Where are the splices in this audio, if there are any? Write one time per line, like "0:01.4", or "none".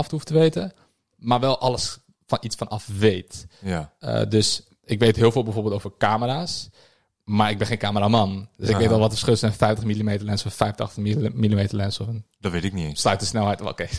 none